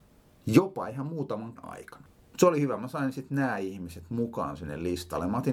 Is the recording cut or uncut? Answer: cut